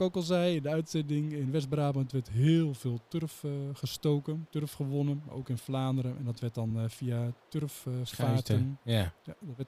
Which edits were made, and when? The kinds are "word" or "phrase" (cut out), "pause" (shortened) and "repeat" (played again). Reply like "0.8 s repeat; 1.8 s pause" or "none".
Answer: none